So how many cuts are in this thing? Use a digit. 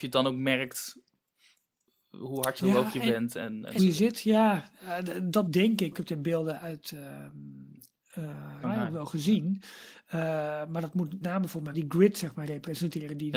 8